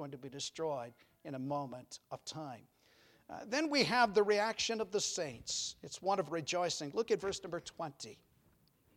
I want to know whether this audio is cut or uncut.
uncut